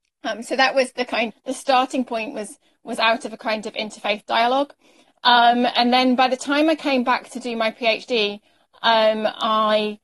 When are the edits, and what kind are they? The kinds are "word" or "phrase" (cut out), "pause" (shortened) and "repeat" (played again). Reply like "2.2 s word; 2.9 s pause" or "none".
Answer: 1.3 s word